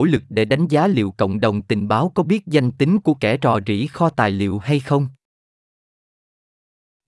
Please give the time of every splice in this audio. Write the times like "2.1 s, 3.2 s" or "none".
none

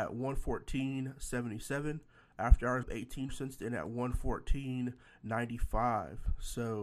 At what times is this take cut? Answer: 2.8 s, 3.3 s

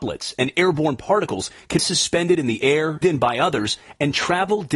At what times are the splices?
1.8 s, 3.0 s

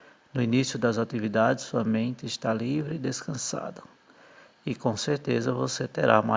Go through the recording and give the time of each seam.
none

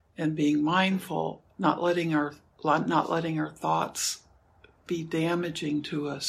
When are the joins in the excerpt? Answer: 1.4 s

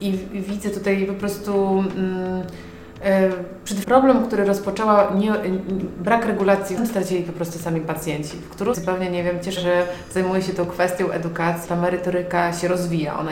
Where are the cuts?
3.8 s, 6.8 s, 8.7 s, 9.6 s, 11.6 s

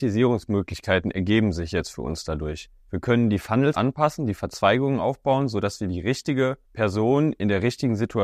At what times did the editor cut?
2.8 s, 3.7 s, 6.6 s

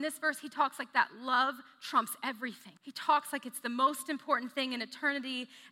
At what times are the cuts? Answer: 2.8 s

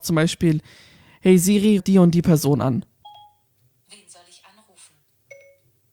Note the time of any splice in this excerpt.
1.8 s

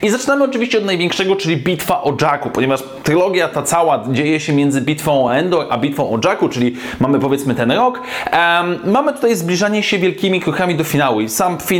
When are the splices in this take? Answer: none

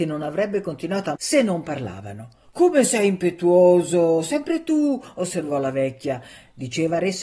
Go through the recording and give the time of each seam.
1.2 s, 2.4 s

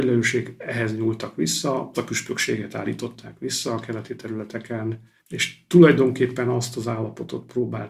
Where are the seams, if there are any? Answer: 1.9 s, 5.2 s

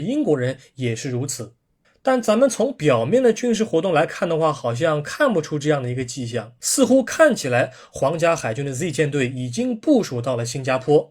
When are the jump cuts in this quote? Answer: 1.8 s

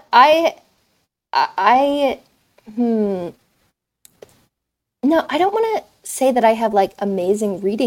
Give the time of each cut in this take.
none

